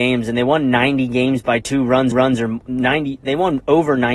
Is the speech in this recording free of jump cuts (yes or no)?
no